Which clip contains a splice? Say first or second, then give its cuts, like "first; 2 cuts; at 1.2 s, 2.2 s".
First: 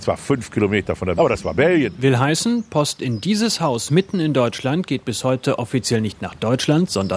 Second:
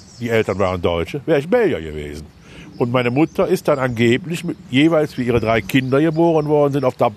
first; 1 cut; at 1.1 s